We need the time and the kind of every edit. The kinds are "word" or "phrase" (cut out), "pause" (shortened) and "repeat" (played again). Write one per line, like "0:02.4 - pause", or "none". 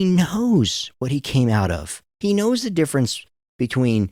0:02.1 - pause